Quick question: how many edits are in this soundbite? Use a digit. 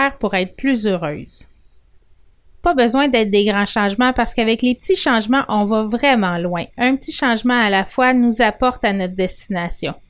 0